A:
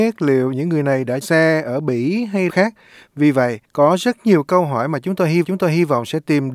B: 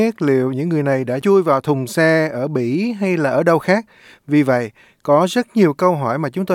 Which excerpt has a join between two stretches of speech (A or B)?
A